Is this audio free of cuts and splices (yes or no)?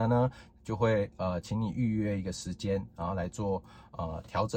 yes